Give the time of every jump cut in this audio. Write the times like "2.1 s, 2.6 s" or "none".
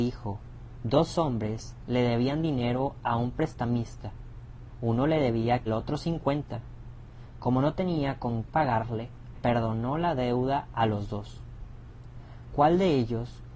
5.7 s, 8.5 s, 9.3 s